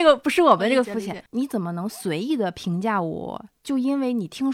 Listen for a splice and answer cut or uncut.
cut